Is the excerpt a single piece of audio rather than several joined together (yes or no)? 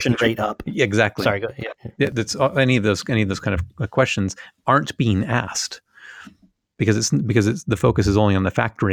yes